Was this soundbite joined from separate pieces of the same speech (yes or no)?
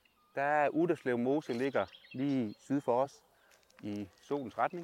no